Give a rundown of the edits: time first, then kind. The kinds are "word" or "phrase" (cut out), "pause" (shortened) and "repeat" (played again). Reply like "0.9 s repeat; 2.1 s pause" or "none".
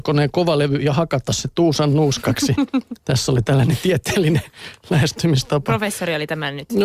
none